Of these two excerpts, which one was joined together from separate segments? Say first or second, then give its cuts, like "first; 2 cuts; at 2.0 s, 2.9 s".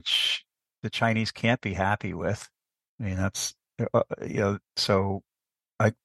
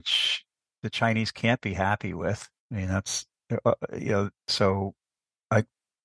second; 1 cut; at 2.6 s